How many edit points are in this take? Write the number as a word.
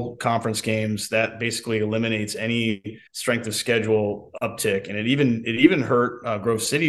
one